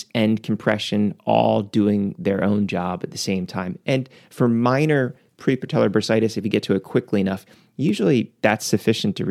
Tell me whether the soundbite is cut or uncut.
uncut